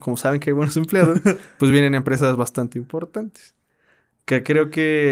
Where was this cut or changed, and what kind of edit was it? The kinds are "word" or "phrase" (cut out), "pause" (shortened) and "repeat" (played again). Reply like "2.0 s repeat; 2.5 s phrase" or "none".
none